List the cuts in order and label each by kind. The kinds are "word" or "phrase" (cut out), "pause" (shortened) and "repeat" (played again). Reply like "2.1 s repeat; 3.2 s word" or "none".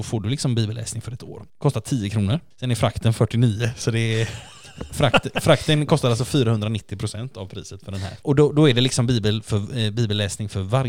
1.2 s word; 1.5 s pause

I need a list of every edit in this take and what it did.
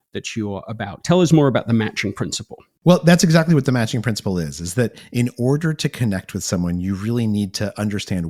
none

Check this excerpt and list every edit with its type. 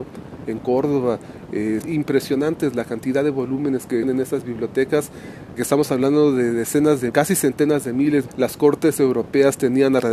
1.8 s word; 4.0 s word; 5.6 s word; 7.1 s word; 8.3 s word

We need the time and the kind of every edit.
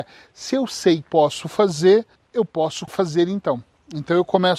1.0 s phrase; 2.2 s pause; 2.9 s word

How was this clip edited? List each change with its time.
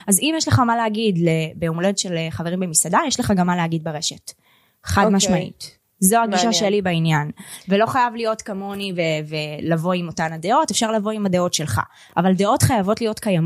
none

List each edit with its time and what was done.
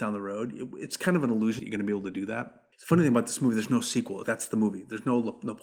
1.6 s phrase; 2.7 s pause; 4.2 s word

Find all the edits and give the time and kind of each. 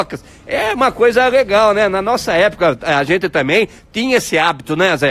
none

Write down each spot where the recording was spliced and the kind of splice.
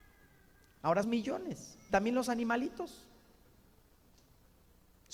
1.0 s word; 1.9 s word

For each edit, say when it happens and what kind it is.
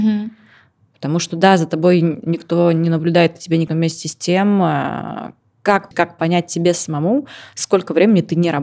3.7 s word; 5.9 s word

